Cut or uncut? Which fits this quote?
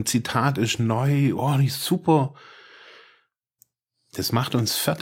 cut